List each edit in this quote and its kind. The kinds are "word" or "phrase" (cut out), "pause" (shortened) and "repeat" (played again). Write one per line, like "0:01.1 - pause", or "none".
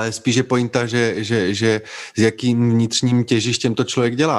none